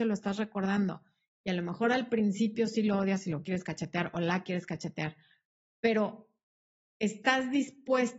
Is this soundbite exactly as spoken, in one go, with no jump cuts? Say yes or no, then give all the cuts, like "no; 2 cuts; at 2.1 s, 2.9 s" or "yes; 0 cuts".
yes; 0 cuts